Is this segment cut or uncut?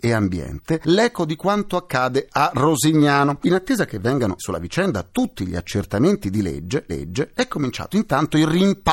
cut